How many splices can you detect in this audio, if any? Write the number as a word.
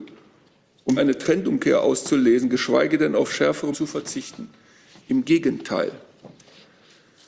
two